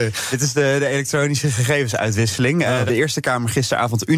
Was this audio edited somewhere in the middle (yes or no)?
yes